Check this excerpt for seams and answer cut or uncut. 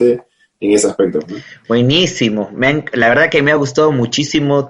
uncut